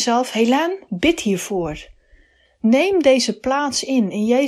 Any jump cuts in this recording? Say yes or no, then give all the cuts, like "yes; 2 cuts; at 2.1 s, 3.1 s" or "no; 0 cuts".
no; 0 cuts